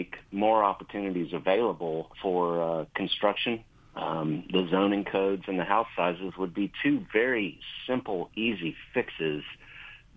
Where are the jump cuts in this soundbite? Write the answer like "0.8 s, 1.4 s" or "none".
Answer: 2.1 s, 3.7 s